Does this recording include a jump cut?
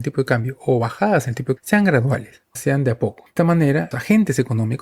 yes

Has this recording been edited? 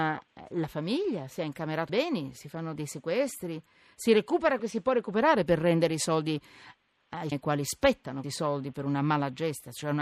yes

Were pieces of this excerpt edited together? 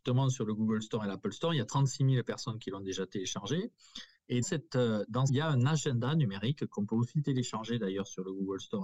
yes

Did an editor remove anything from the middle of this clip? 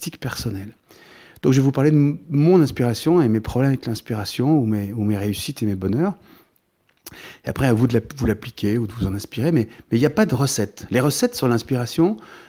no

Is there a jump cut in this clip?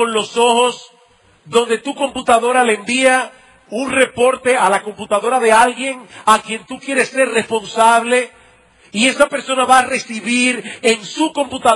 no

